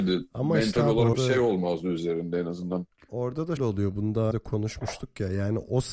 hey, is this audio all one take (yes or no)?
no